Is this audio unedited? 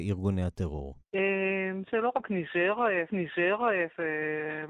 no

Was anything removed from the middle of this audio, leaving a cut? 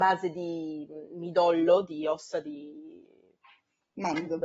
no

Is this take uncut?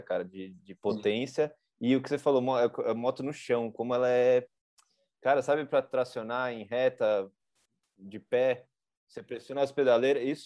yes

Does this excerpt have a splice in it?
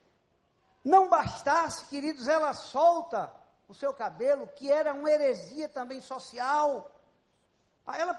no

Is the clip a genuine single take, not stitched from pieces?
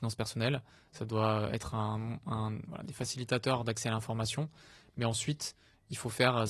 yes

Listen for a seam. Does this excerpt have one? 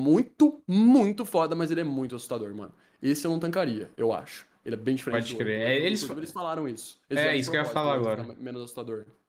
no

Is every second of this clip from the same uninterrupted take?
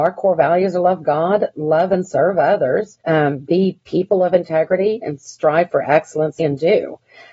no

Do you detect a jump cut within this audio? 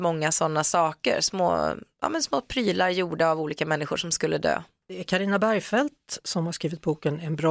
no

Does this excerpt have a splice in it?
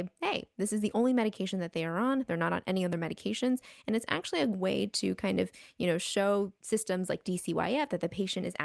no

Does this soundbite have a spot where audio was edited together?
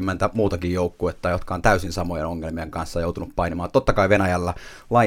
no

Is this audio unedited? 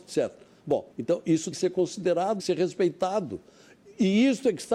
no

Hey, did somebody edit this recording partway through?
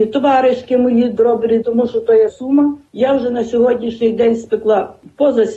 yes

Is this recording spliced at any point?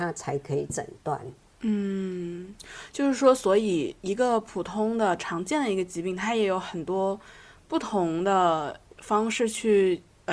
no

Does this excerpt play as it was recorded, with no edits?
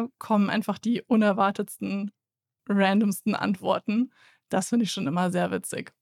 yes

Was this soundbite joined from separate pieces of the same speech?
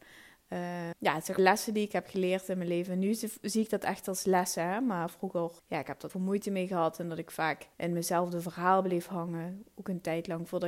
yes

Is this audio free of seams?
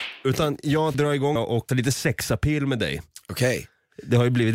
no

